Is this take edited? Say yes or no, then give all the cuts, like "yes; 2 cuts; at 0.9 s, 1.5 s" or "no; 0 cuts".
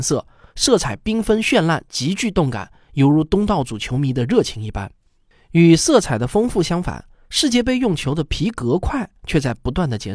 no; 0 cuts